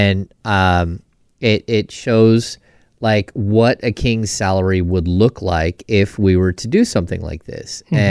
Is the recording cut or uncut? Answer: uncut